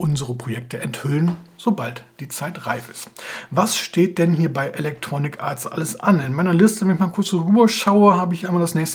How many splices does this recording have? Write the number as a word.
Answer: zero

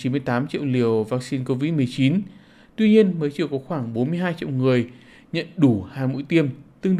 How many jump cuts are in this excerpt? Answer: zero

